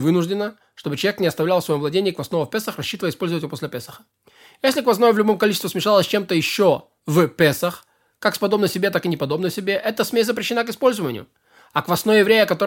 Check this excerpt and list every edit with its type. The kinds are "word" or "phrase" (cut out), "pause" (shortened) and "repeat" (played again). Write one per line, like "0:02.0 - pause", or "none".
none